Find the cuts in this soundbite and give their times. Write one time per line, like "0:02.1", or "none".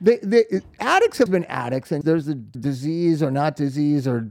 0:01.3
0:02.0
0:02.5